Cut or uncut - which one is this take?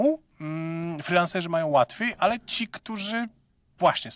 uncut